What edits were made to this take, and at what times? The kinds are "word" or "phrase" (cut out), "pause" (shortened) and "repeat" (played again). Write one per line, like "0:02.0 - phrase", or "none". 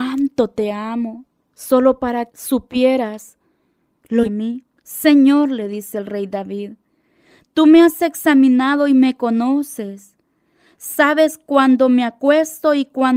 0:02.3 - word
0:04.2 - phrase